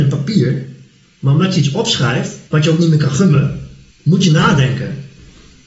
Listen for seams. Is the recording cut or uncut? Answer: cut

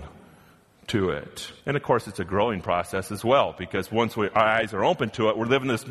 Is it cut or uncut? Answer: cut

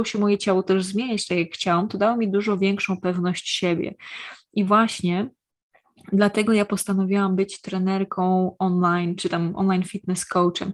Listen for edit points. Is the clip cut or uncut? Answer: uncut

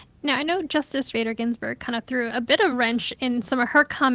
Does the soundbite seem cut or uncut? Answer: cut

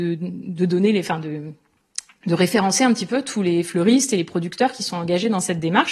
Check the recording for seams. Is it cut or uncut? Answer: uncut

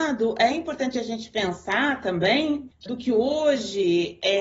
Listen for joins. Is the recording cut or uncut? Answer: cut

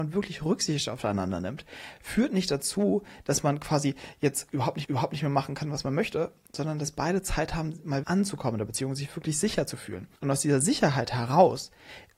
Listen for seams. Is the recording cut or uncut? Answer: cut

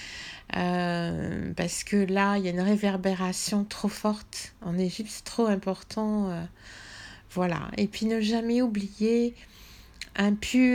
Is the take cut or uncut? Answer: uncut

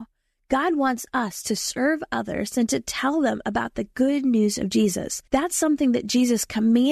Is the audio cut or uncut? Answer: cut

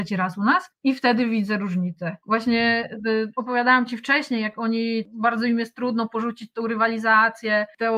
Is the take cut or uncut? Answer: cut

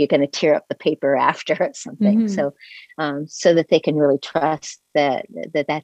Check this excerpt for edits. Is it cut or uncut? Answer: uncut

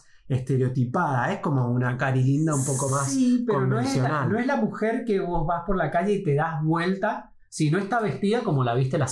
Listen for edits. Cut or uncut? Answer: uncut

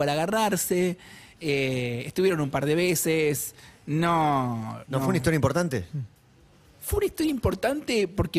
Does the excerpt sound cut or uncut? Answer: uncut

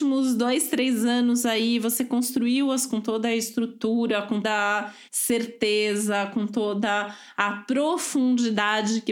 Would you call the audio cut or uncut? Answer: cut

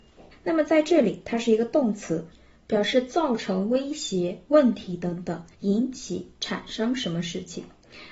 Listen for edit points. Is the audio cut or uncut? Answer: cut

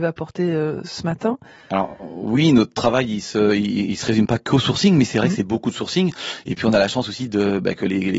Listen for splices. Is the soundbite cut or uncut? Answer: uncut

